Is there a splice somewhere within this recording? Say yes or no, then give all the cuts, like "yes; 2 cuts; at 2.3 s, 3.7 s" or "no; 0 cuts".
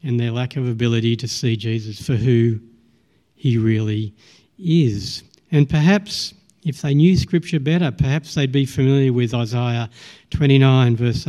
no; 0 cuts